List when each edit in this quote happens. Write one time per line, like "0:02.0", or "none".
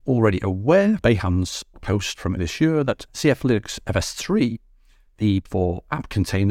0:01.0
0:01.7
0:02.4
0:03.1
0:05.5